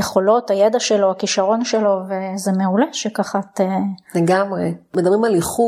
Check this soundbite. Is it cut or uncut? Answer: uncut